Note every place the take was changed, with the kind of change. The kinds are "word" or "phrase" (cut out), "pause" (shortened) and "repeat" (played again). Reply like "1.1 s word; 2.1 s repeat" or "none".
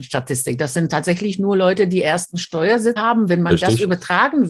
3.0 s word